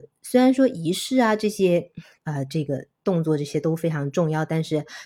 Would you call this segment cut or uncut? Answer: uncut